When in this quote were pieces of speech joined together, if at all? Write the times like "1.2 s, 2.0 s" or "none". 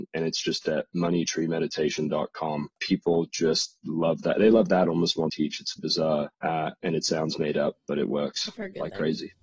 2.7 s, 5.3 s, 5.8 s, 6.3 s